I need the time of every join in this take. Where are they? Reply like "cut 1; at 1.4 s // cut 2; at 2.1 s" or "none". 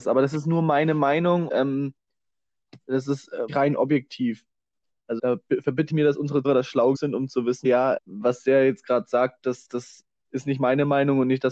cut 1; at 1.5 s // cut 2; at 3.5 s // cut 3; at 5.2 s // cut 4; at 5.9 s // cut 5; at 6.4 s // cut 6; at 6.9 s // cut 7; at 7.6 s // cut 8; at 8.0 s

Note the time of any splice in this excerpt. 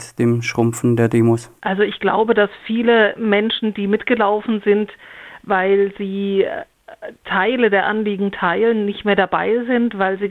cut 1; at 1.6 s

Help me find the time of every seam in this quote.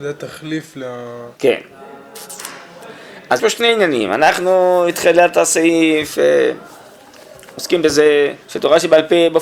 cut 1; at 1.3 s // cut 2; at 3.4 s // cut 3; at 8.4 s

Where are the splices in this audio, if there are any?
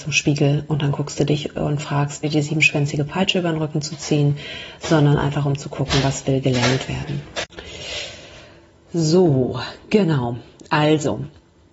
cut 1; at 2.2 s

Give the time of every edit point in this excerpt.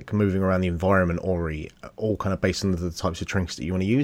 none

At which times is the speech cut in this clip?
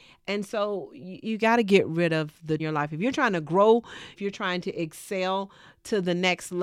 cut 1; at 2.6 s // cut 2; at 4.2 s

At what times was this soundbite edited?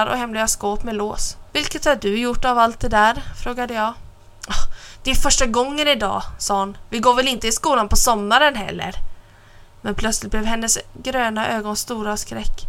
cut 1; at 1.5 s

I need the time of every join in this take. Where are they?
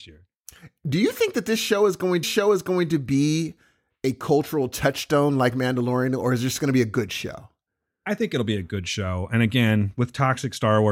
cut 1; at 2.2 s

